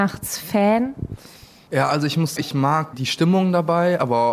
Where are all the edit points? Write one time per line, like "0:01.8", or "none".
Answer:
0:02.4
0:02.9